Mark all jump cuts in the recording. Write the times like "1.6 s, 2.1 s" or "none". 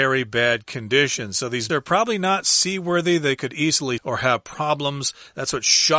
1.7 s, 4.0 s